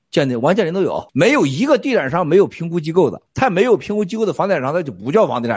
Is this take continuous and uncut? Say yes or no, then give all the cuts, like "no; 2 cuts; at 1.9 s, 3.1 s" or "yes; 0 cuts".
no; 2 cuts; at 1.1 s, 3.3 s